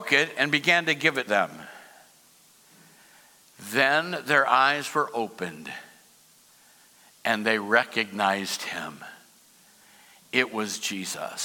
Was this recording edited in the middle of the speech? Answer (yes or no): yes